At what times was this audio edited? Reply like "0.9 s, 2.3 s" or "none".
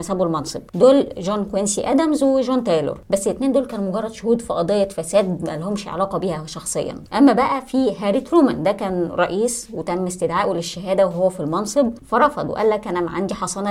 none